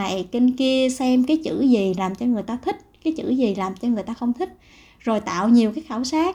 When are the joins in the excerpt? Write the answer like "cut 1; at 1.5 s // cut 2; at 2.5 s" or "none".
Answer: none